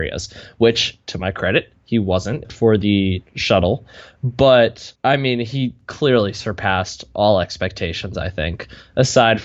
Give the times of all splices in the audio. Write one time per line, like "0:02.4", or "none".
0:02.4
0:03.3
0:05.0